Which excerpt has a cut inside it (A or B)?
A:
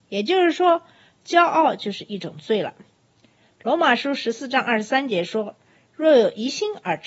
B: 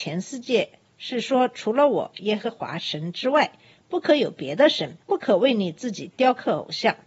B